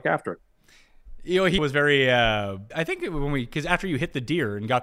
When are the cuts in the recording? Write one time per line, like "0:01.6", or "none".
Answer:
0:01.6
0:02.7